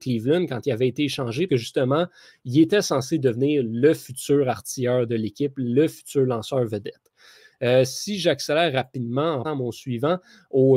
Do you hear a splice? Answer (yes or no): yes